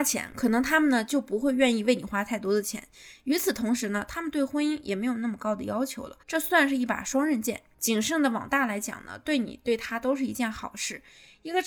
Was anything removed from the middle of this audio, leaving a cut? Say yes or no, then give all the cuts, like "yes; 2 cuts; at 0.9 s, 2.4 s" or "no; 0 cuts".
yes; 1 cut; at 6.2 s